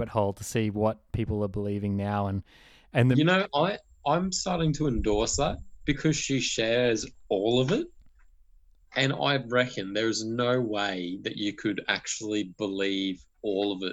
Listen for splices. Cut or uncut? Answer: uncut